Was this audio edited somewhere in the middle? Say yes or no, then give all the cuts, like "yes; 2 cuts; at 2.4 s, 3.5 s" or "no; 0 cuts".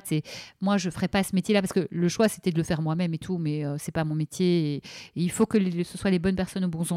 no; 0 cuts